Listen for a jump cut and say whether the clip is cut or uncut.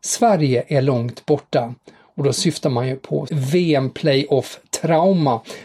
cut